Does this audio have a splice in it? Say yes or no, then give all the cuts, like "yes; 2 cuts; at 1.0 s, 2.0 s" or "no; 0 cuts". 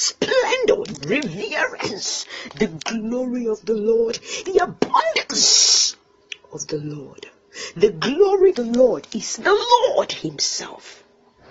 yes; 4 cuts; at 1.0 s, 4.4 s, 8.5 s, 9.4 s